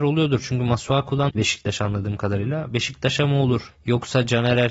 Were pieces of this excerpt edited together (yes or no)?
yes